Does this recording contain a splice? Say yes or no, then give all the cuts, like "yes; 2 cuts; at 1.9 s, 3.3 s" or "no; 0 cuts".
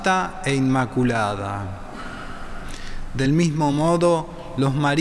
no; 0 cuts